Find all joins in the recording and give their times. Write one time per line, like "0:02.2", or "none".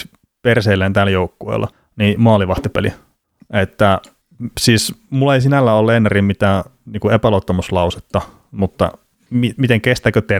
none